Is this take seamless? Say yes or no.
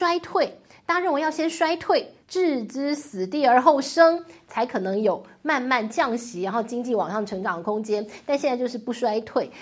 no